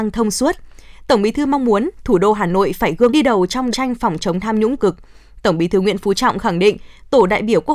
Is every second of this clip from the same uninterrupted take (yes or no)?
no